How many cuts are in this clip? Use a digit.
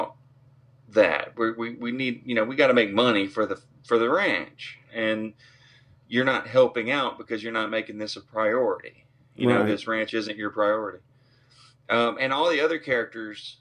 0